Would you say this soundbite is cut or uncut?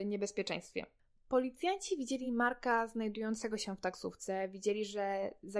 uncut